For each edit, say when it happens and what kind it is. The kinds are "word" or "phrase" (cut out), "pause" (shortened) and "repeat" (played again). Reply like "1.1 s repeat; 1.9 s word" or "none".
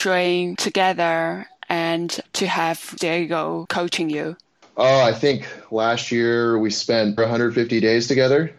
4.5 s pause; 7.2 s word

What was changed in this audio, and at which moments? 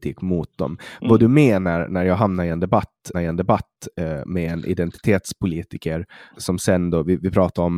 3.1 s repeat; 6.3 s word

